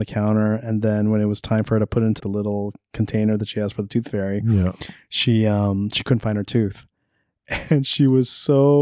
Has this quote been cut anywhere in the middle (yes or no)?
yes